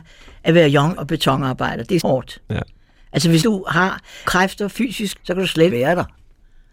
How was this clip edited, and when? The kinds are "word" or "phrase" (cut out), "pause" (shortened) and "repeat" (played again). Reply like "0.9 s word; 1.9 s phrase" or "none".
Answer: 1.0 s word; 2.0 s word; 3.4 s word; 4.3 s word; 5.2 s word; 5.7 s word

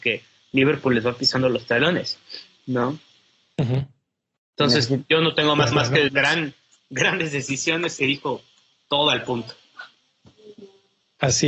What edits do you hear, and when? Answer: 5.7 s repeat; 6.1 s phrase

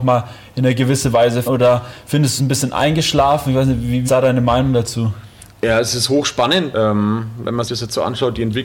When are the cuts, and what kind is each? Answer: 1.5 s word; 2.4 s word; 4.1 s word; 6.7 s word; 7.7 s word

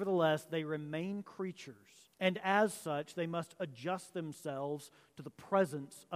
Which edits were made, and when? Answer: 2.1 s pause

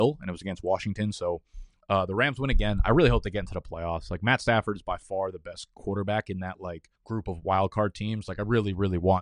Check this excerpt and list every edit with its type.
7.0 s pause

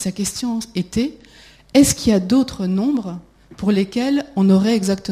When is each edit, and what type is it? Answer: none

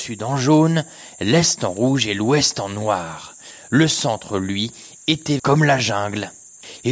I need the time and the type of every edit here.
5.4 s word

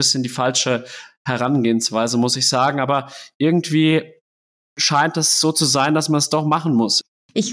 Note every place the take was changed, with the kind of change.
none

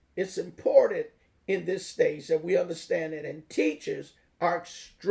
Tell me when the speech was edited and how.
none

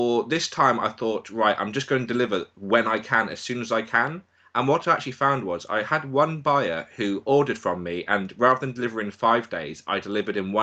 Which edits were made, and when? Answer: none

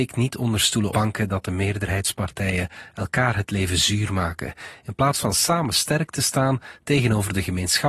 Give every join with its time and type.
0.9 s word

